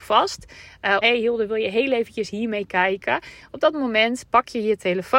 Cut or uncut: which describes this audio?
cut